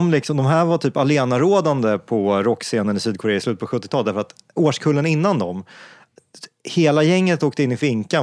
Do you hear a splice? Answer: no; 0 cuts

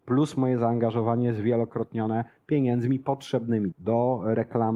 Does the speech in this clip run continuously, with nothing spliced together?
no; 1 cut; at 3.7 s

